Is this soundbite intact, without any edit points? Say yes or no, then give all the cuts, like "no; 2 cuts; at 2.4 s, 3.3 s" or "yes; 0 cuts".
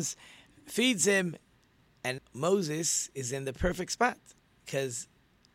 no; 1 cut; at 2.2 s